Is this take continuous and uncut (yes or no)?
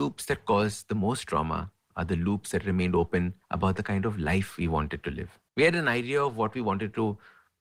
no